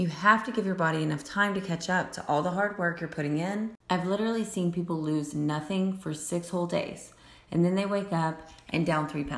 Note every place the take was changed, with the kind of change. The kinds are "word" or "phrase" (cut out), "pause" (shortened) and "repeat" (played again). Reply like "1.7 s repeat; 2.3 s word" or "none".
3.8 s pause